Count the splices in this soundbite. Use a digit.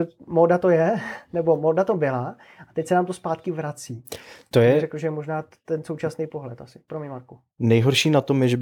0